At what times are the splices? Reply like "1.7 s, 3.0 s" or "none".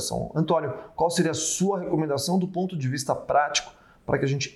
none